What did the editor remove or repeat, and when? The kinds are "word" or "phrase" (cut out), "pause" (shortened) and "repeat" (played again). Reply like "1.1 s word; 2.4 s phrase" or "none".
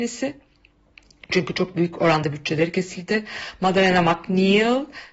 none